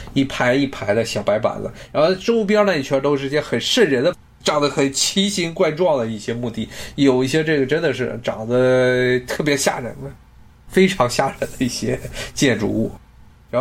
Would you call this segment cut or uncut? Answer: uncut